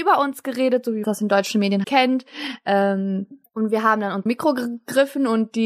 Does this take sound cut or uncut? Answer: cut